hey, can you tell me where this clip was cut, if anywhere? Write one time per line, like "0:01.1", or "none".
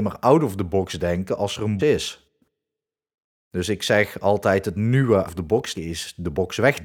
0:01.8
0:05.3
0:05.7